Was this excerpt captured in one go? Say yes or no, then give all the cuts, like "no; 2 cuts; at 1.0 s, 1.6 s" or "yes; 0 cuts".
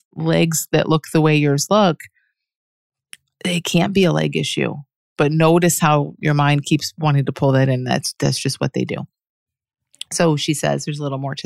yes; 0 cuts